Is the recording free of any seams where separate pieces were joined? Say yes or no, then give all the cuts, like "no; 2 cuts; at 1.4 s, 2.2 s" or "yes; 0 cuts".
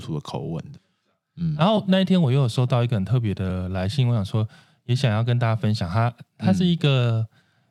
yes; 0 cuts